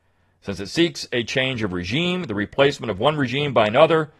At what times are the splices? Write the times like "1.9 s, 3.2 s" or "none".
none